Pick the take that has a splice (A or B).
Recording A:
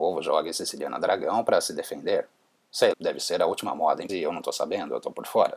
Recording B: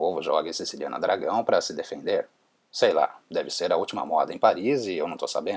A